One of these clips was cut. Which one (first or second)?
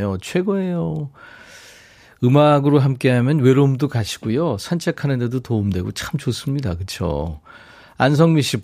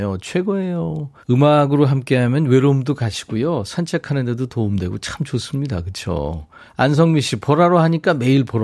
second